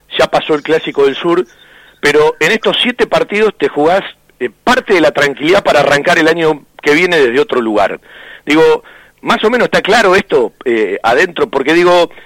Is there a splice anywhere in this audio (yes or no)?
no